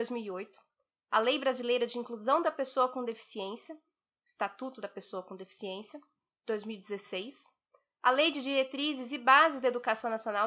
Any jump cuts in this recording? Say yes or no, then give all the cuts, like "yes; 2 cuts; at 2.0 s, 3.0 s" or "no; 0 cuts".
no; 0 cuts